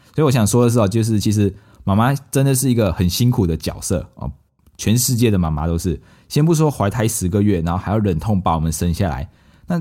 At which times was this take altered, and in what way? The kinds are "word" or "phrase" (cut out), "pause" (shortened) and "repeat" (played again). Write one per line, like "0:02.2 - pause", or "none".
none